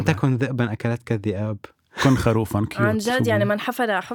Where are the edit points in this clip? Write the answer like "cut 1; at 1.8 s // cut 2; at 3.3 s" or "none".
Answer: none